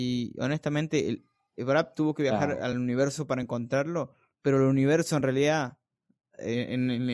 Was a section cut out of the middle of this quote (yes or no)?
no